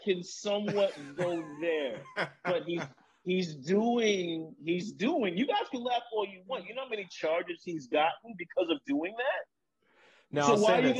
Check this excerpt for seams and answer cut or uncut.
uncut